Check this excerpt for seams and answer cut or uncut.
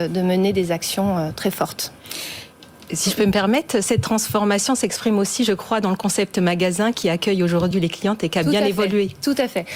uncut